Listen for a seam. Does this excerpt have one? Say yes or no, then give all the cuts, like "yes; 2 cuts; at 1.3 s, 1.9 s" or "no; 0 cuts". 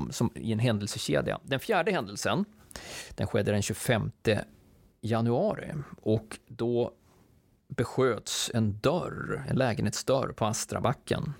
no; 0 cuts